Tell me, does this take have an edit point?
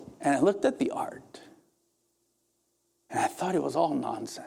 no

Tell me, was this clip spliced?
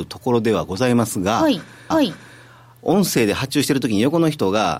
yes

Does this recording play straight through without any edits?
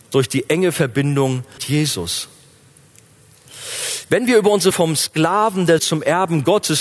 no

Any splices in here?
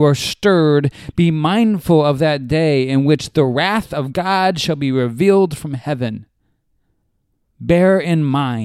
no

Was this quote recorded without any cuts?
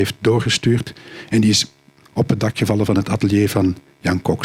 yes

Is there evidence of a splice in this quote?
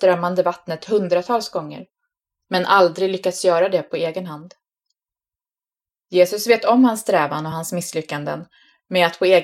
no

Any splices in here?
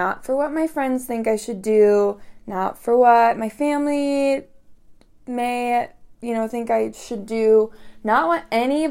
no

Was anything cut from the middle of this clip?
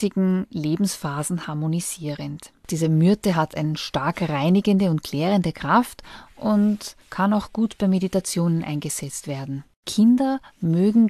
yes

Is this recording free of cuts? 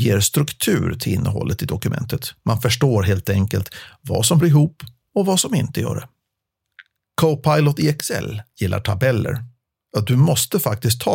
no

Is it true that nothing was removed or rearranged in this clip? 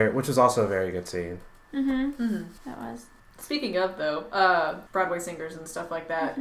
no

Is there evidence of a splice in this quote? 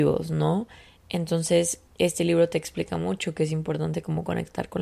yes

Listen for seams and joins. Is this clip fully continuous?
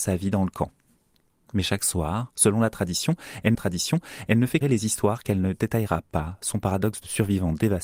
no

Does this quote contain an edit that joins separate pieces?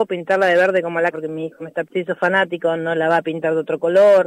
yes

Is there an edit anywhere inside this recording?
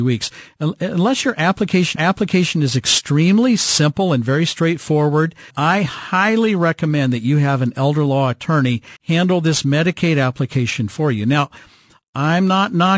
yes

